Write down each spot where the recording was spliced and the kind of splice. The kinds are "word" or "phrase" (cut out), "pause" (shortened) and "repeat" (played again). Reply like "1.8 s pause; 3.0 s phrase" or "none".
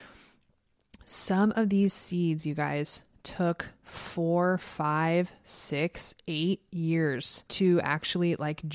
3.8 s pause; 7.5 s pause